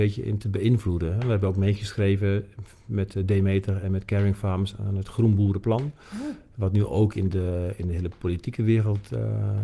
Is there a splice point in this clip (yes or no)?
no